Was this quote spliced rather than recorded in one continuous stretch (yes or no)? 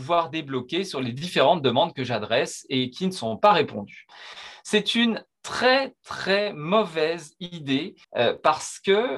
yes